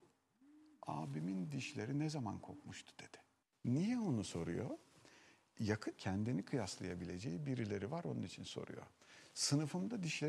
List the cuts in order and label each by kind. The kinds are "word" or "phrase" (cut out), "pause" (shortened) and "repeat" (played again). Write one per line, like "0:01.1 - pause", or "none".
0:03.4 - pause
0:06.0 - word